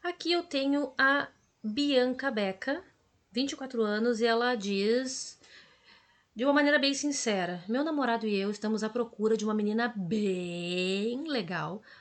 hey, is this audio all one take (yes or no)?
yes